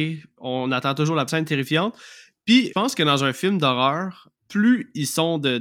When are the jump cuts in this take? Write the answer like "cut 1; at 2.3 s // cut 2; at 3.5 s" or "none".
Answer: cut 1; at 1.3 s // cut 2; at 2.7 s // cut 3; at 4.4 s